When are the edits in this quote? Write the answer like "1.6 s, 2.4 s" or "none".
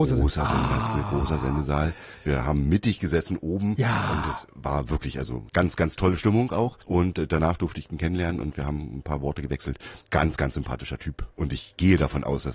5.5 s, 6.8 s